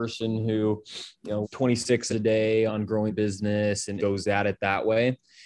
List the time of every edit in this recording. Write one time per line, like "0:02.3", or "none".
0:01.4
0:02.1
0:02.7
0:03.1
0:04.0